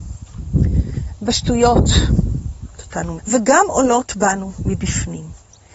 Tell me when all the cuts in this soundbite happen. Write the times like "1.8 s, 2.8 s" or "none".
2.7 s, 3.2 s